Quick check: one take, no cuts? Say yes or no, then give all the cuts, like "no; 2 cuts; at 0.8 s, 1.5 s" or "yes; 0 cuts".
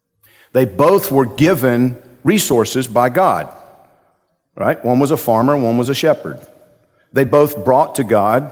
yes; 0 cuts